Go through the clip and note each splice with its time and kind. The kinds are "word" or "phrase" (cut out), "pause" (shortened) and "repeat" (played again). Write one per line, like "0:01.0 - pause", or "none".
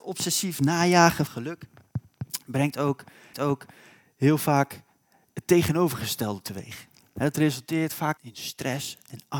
0:01.3 - word
0:03.3 - repeat
0:08.2 - word